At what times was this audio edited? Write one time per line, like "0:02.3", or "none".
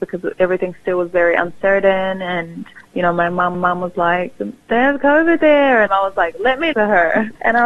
0:02.8
0:03.5
0:06.7